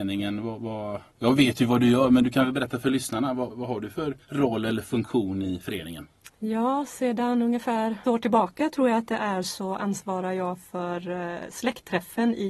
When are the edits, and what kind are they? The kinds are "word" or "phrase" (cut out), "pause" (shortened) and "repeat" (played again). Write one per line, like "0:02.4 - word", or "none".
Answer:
0:01.1 - pause
0:03.5 - word
0:08.0 - word